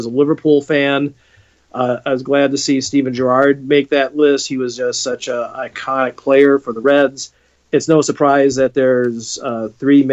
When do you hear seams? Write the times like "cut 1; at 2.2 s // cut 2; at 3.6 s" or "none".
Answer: none